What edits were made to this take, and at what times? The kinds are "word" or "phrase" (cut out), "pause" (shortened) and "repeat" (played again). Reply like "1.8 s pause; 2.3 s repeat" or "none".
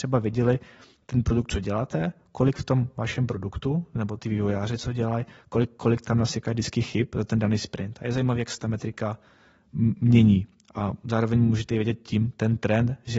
none